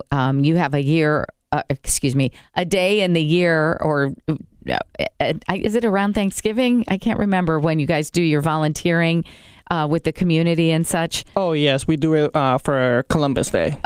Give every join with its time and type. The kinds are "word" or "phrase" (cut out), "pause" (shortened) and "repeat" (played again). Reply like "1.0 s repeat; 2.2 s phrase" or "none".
none